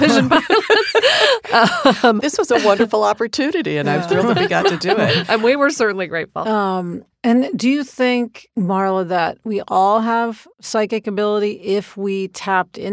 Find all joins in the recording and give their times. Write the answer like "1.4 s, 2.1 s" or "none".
2.2 s, 10.5 s